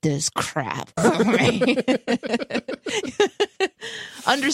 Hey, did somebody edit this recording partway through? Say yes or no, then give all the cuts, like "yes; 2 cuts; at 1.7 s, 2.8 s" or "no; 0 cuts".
yes; 1 cut; at 1.0 s